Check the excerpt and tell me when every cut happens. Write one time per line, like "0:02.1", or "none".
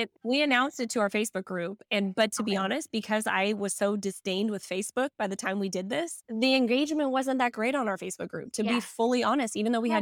none